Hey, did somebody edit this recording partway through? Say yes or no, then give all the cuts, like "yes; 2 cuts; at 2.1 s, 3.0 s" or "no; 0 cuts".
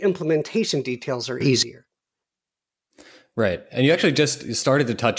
no; 0 cuts